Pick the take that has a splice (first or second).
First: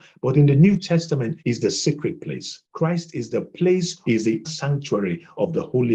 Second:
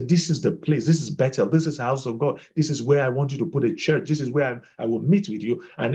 first